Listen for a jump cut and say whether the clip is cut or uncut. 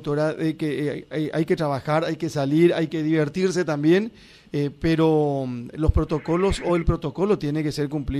uncut